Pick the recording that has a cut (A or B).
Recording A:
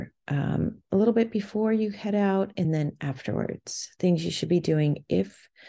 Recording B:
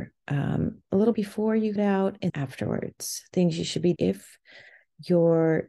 B